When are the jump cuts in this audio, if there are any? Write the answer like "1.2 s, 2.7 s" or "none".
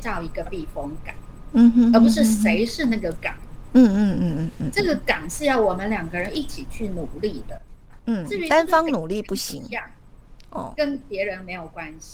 none